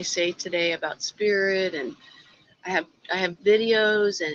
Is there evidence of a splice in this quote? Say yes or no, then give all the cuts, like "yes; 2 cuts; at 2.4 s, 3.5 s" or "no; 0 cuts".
no; 0 cuts